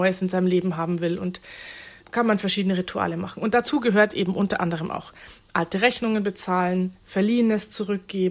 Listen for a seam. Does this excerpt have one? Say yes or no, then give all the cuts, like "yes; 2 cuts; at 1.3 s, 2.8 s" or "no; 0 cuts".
yes; 1 cut; at 2.0 s